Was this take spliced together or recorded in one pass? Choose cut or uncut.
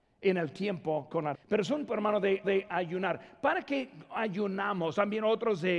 cut